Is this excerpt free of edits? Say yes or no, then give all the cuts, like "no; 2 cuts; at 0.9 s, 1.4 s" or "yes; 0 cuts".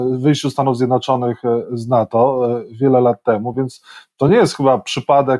yes; 0 cuts